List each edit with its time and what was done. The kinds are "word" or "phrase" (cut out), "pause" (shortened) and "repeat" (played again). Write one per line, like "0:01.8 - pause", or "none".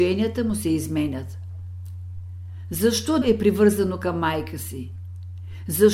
0:03.2 - word

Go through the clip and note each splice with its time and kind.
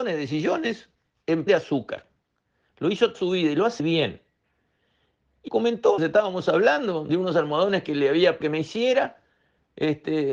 0:01.5 - word
0:03.1 - word
0:03.8 - word
0:05.5 - word
0:06.0 - word
0:07.1 - word
0:08.4 - word

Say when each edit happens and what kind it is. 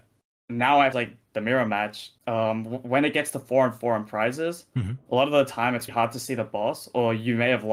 0:00.9 - phrase
0:02.2 - pause
0:05.9 - word

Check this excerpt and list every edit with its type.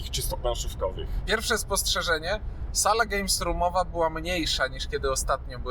none

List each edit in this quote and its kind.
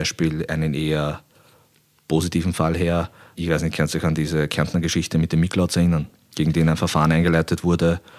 none

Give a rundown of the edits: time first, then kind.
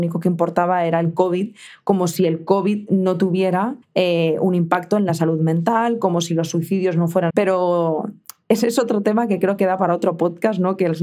0:03.8 - pause
0:07.3 - phrase

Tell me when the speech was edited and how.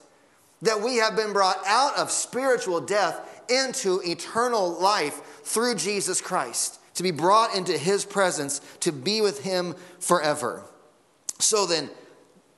0:06.9 - pause

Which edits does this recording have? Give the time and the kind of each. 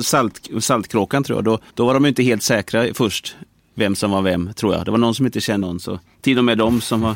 0:01.7 - pause
0:05.6 - word

